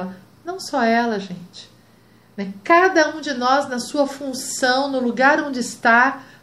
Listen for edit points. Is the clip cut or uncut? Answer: uncut